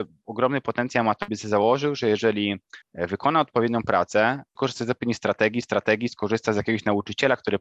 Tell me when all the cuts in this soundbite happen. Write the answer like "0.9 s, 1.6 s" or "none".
1.3 s, 2.8 s, 4.6 s, 5.6 s